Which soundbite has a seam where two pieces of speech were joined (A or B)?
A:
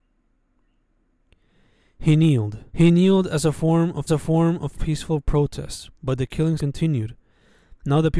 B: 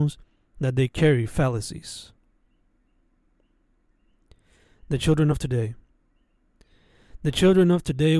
A